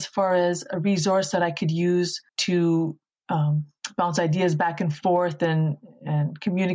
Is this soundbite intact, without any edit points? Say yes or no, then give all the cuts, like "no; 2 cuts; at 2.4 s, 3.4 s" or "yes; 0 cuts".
no; 1 cut; at 2.3 s